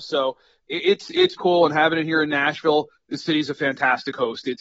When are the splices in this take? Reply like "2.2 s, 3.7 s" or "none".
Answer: 1.4 s